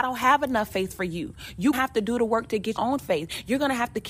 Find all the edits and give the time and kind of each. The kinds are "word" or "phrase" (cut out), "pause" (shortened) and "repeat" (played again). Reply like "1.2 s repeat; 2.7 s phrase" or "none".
1.7 s word; 2.8 s word